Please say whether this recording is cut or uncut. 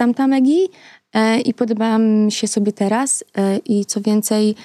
uncut